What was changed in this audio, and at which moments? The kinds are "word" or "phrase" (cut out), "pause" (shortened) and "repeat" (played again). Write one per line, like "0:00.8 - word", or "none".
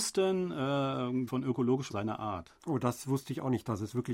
0:01.3 - word
0:01.9 - word
0:02.6 - pause